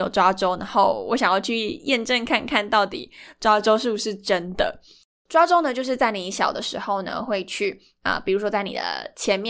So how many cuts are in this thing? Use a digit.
0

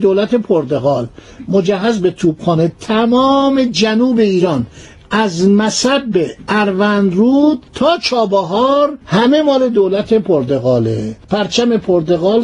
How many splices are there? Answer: 3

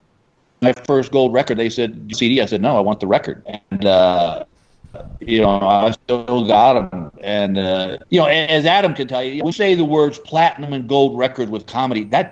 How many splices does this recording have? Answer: 5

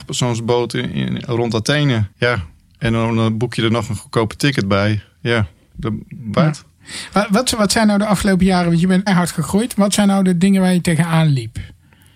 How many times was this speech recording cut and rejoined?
3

